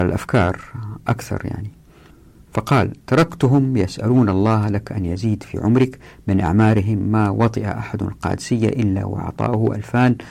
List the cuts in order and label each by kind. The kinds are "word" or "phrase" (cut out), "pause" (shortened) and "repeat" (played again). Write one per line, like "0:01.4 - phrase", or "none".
none